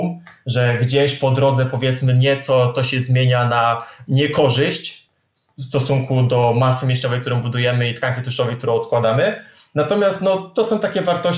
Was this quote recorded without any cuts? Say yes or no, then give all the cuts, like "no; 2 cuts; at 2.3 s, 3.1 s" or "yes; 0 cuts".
yes; 0 cuts